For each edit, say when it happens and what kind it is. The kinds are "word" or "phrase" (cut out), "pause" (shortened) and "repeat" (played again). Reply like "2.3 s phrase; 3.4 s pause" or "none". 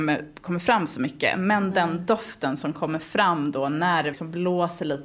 4.1 s word